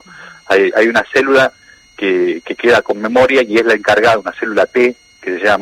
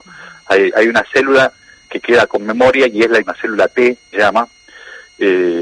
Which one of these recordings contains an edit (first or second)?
second